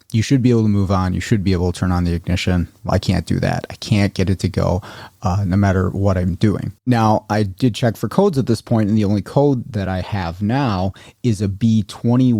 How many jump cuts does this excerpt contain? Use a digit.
1